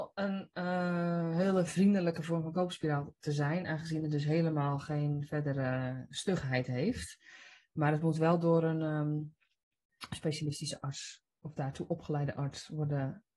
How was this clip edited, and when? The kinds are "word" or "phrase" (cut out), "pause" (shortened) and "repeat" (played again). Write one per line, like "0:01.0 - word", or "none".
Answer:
none